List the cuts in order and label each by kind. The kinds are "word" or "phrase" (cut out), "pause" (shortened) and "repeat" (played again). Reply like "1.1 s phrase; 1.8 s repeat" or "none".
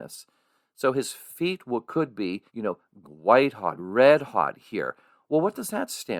2.5 s pause; 3.0 s word; 3.8 s word